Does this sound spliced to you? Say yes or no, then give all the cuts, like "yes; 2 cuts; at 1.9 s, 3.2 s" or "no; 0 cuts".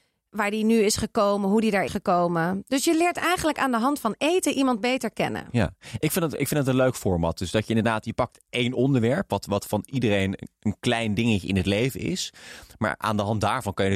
yes; 1 cut; at 1.9 s